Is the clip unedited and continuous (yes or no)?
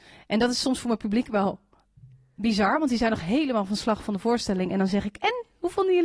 yes